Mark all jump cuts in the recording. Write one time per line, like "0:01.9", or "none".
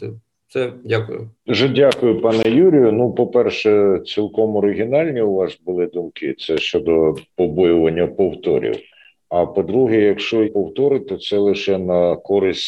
0:01.4
0:07.3
0:10.4